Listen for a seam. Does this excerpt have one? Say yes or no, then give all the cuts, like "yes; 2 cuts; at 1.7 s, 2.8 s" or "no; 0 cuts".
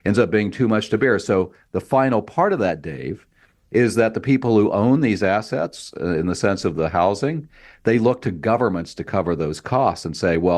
no; 0 cuts